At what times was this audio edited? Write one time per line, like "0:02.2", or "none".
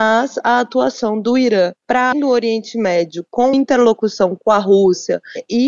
0:02.1
0:03.5